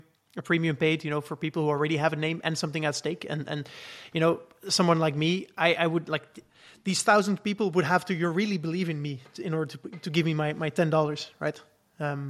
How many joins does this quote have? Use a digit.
1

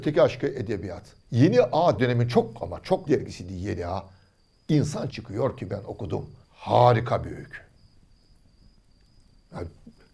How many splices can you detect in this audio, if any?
5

